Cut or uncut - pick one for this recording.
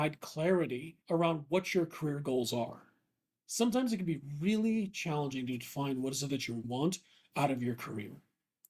cut